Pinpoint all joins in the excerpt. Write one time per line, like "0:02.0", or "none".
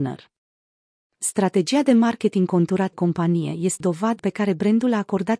0:02.9
0:03.8
0:04.2